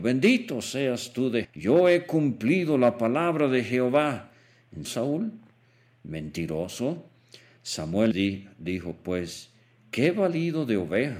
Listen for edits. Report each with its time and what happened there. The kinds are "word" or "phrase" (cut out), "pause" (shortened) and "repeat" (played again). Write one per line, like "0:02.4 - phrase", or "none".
0:01.4 - word
0:04.8 - word
0:08.1 - word